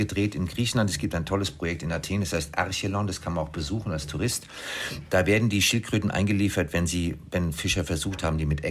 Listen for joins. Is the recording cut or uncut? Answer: uncut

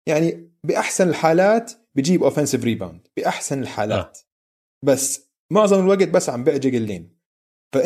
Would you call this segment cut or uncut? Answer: uncut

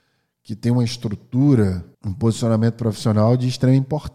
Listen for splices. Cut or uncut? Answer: cut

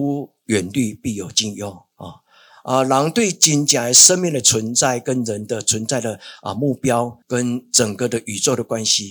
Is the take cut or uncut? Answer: cut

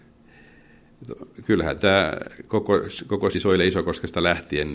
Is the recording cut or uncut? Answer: cut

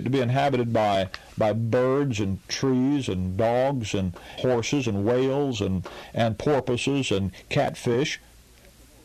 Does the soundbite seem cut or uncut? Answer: cut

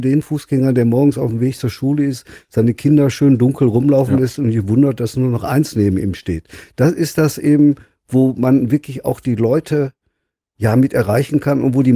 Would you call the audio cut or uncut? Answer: uncut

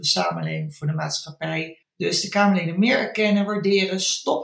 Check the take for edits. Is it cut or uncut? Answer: cut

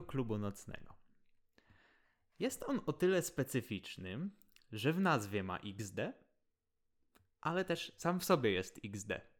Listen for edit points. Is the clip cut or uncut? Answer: uncut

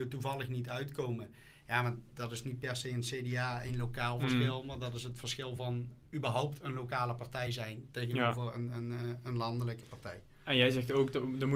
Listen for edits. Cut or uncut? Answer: uncut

